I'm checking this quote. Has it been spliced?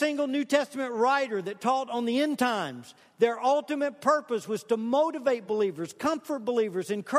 no; 0 cuts

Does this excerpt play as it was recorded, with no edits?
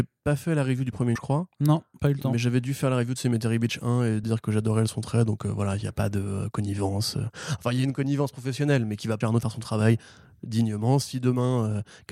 no; 3 cuts; at 1.2 s, 4.2 s, 9.2 s

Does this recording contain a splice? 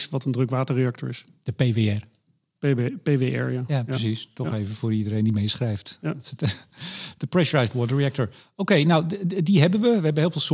no; 0 cuts

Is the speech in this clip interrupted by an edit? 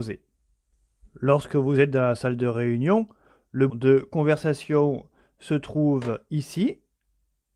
yes; 1 cut; at 3.7 s

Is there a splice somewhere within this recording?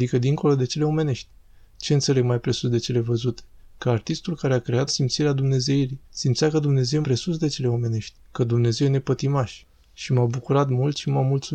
yes; 4 cuts; at 4.9 s, 6.0 s, 7.0 s, 8.2 s

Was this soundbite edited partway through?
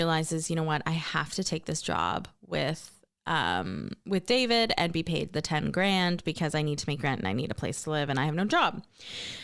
no; 0 cuts

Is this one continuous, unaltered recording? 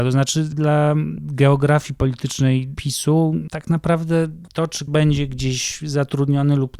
no; 1 cut; at 4.9 s

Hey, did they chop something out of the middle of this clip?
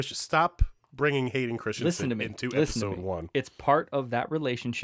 no; 0 cuts

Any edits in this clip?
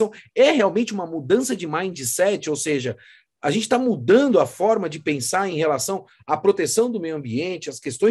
no; 0 cuts

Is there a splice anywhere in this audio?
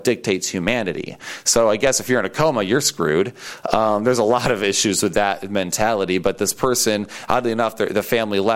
no; 0 cuts

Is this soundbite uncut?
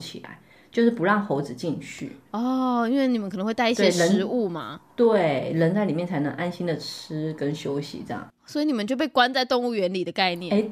no; 1 cut; at 4.9 s

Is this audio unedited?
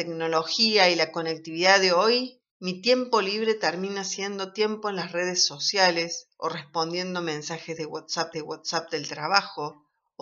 no; 2 cuts; at 2.5 s, 8.3 s

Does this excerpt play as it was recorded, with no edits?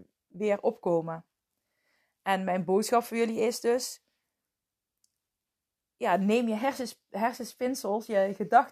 yes; 0 cuts

